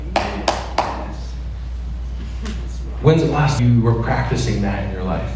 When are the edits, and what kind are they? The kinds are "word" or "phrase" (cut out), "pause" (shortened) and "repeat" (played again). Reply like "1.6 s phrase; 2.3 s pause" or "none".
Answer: 3.6 s word

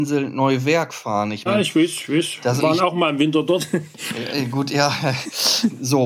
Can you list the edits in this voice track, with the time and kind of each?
1.5 s word; 2.6 s phrase

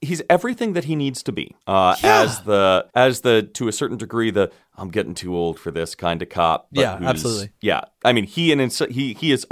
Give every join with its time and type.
1.6 s pause; 2.9 s pause

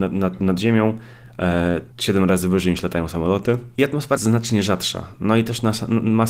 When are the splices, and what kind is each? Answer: 1.9 s pause; 4.2 s word

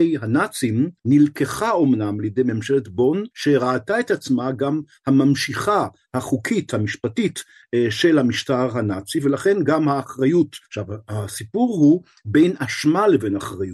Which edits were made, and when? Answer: 1.0 s pause; 3.3 s pause; 10.6 s pause

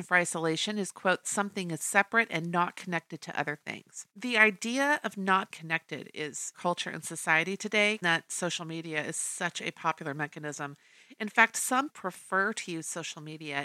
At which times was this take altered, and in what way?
1.2 s phrase; 4.1 s pause; 5.5 s word; 6.5 s phrase; 8.0 s word; 11.9 s word

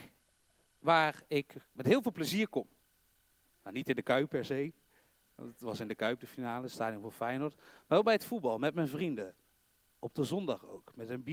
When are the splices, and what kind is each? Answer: none

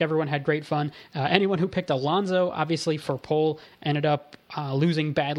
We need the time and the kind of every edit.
none

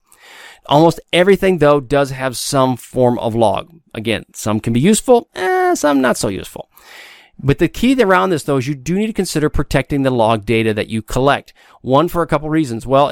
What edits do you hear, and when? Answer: none

